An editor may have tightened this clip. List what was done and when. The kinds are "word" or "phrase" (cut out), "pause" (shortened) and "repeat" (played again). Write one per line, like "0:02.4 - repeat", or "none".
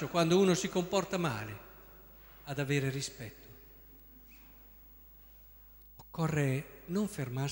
none